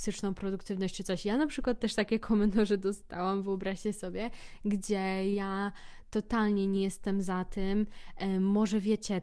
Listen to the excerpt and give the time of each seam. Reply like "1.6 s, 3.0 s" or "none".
none